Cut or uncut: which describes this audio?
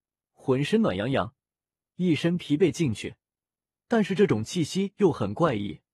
uncut